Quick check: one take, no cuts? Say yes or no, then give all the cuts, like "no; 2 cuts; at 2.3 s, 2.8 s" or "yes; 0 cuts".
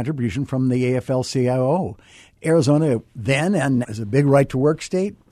no; 2 cuts; at 3.1 s, 3.8 s